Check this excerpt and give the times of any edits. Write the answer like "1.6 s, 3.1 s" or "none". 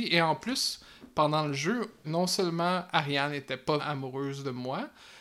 2.0 s, 3.8 s